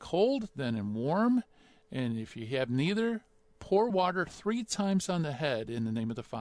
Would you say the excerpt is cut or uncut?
uncut